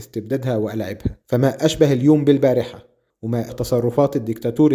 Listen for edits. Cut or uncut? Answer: cut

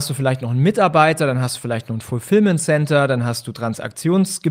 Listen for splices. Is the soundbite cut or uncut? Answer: uncut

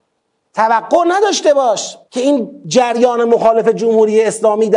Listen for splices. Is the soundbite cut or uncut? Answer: cut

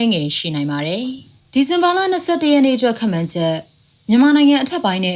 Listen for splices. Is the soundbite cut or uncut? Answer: uncut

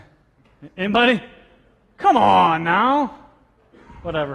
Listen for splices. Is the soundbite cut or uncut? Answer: uncut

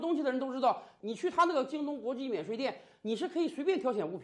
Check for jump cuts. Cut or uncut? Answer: uncut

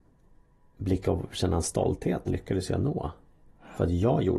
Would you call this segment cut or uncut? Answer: cut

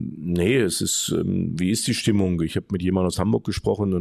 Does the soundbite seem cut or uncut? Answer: uncut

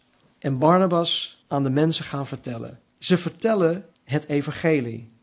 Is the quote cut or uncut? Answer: cut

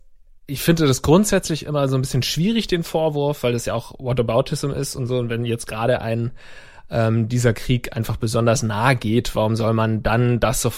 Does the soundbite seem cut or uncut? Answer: uncut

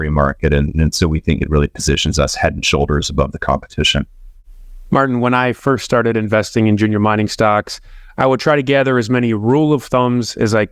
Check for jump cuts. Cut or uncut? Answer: uncut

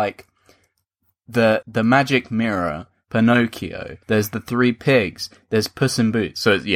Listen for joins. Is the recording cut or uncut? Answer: cut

